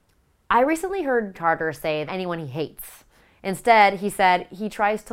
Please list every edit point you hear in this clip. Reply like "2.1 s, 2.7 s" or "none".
1.3 s, 2.1 s